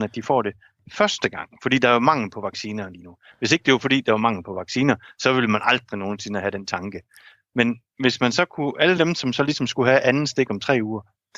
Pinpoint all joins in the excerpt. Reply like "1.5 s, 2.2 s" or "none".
none